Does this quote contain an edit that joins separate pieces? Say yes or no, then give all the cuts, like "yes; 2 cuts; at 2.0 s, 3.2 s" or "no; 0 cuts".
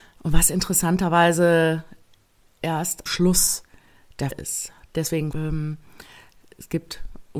yes; 4 cuts; at 2.6 s, 3.1 s, 4.3 s, 5.3 s